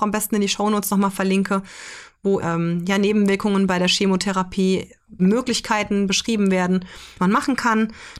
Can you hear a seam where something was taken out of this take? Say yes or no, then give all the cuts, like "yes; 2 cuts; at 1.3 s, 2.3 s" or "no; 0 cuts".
yes; 3 cuts; at 2.4 s, 5.2 s, 7.2 s